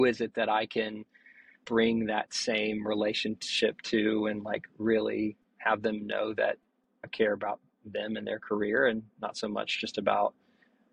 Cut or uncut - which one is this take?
uncut